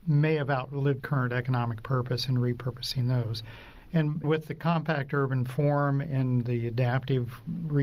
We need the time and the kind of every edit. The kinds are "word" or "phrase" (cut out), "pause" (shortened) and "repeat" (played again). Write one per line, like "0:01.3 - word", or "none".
0:01.0 - word
0:04.2 - word